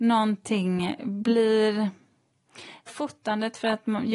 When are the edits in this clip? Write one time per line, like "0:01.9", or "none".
0:02.9